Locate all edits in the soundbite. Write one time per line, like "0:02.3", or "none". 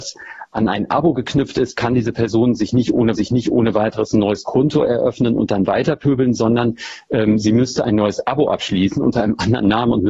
0:03.2